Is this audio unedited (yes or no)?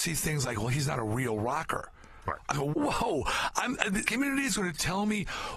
no